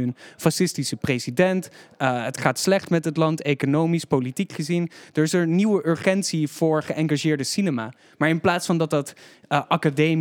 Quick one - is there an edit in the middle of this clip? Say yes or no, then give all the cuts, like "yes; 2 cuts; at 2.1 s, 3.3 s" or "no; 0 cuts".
no; 0 cuts